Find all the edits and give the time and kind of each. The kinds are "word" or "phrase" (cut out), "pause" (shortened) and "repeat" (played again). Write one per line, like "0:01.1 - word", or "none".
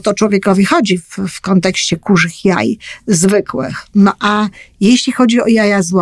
none